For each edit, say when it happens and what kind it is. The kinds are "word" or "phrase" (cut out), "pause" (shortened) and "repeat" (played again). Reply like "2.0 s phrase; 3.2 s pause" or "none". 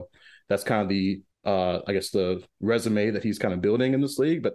1.3 s pause; 2.5 s pause